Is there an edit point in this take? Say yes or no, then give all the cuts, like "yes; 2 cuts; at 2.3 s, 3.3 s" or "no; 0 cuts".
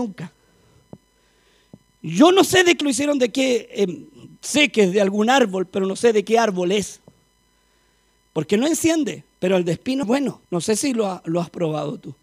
yes; 3 cuts; at 2.8 s, 10.0 s, 10.5 s